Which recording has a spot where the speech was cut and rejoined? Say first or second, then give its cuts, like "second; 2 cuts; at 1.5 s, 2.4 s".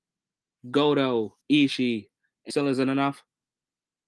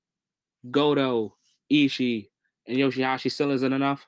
first; 2 cuts; at 1.4 s, 2.5 s